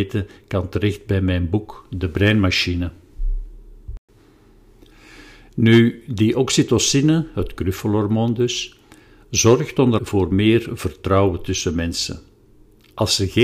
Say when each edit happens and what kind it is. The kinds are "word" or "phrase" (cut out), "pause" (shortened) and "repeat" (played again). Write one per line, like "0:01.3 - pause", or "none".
0:10.0 - word